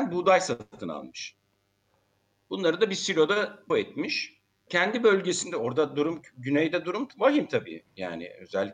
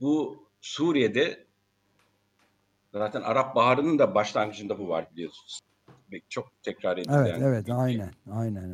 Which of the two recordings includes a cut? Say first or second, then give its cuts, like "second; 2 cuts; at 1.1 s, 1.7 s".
first; 2 cuts; at 3.7 s, 4.7 s